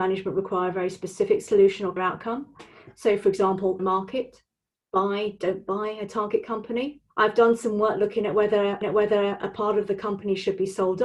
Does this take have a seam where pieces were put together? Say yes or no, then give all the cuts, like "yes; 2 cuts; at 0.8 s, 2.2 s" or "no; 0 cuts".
yes; 4 cuts; at 2.0 s, 3.8 s, 7.1 s, 8.8 s